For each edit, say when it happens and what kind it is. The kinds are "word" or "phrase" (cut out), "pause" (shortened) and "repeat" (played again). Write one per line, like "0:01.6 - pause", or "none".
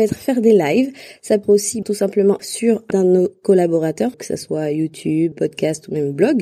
0:01.4 - word
0:01.8 - word
0:02.4 - word
0:02.9 - word
0:04.1 - word
0:05.3 - word